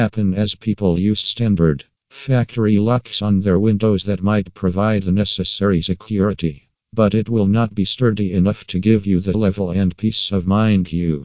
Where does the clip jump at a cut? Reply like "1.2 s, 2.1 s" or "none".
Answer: 9.3 s